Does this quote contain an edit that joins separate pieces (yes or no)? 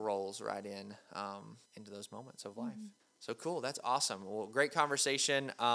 yes